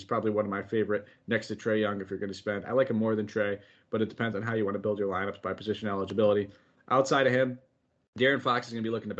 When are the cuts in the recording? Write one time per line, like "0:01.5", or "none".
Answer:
none